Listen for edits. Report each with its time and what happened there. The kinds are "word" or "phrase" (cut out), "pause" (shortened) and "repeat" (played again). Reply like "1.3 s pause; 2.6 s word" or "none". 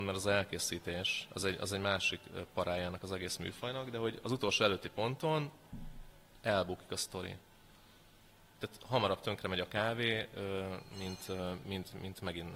none